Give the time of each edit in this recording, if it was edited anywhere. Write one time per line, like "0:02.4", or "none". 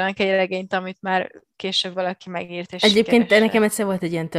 none